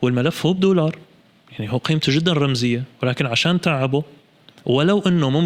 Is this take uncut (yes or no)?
yes